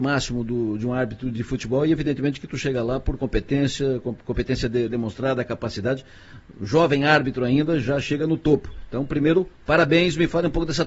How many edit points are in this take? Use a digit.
0